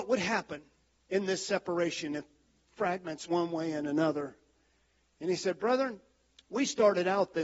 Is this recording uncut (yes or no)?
no